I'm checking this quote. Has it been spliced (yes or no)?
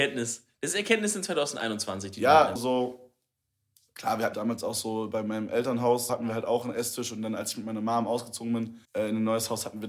yes